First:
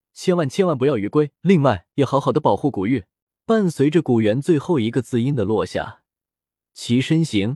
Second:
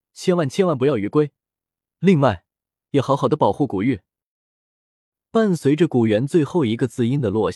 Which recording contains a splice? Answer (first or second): first